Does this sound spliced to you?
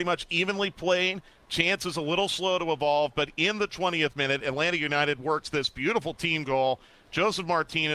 no; 0 cuts

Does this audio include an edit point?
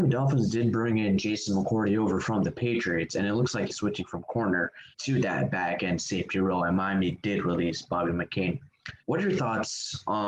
yes; 3 cuts; at 3.7 s, 4.9 s, 9.0 s

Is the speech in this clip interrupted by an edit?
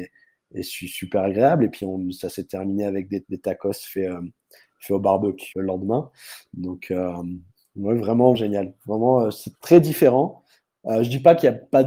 yes; 4 cuts; at 3.2 s, 5.5 s, 8.3 s, 9.5 s

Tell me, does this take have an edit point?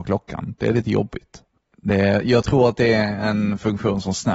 no; 0 cuts

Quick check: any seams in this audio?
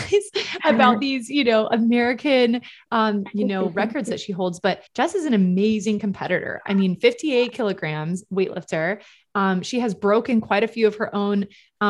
yes; 1 cut; at 4.9 s

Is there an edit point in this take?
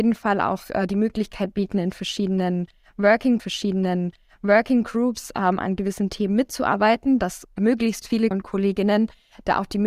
yes; 2 cuts; at 3.4 s, 8.3 s

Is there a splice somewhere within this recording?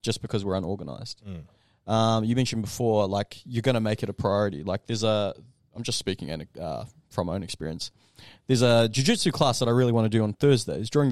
no; 0 cuts

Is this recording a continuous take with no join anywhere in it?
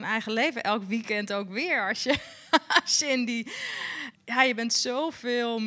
no; 1 cut; at 4.1 s

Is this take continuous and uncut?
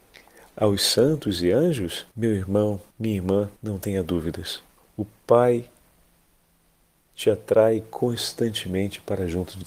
no; 4 cuts; at 2.1 s, 2.9 s, 3.6 s, 4.8 s

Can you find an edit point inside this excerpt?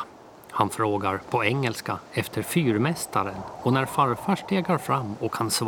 no; 0 cuts

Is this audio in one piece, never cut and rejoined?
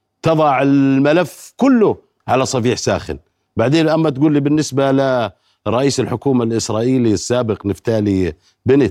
yes; 0 cuts

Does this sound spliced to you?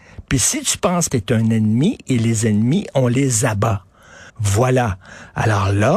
yes; 2 cuts; at 1.1 s, 4.3 s

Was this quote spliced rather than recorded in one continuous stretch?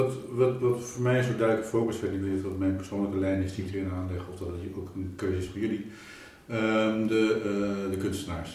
no; 0 cuts

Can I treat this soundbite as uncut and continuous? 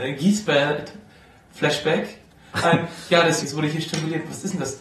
no; 2 cuts; at 2.6 s, 3.4 s

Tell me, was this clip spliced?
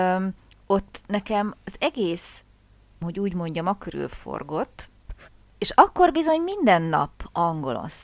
yes; 1 cut; at 3.0 s

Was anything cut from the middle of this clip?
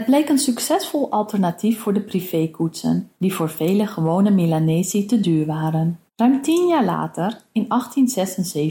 yes; 2 cuts; at 3.1 s, 6.1 s

